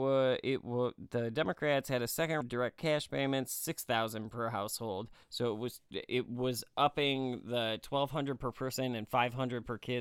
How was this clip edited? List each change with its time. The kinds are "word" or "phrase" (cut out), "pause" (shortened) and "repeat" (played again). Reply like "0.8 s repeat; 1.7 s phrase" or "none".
2.4 s word; 5.2 s pause